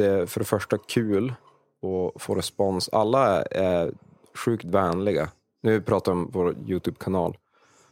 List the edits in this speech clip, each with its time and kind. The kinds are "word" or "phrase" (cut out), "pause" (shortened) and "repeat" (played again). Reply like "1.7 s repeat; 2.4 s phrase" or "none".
none